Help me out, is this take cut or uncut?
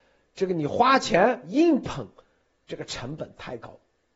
uncut